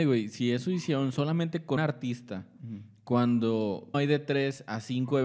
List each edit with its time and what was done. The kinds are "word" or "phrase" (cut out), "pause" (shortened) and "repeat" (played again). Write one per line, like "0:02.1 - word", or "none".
0:01.8 - word
0:03.9 - word